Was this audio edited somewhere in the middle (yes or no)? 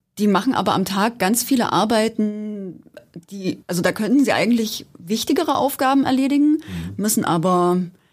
yes